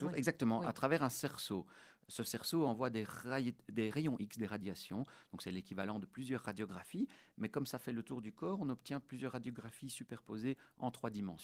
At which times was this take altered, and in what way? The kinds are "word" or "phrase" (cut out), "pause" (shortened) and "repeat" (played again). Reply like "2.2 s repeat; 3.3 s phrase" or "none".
none